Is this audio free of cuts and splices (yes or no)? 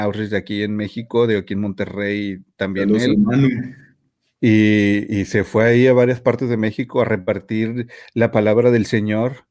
yes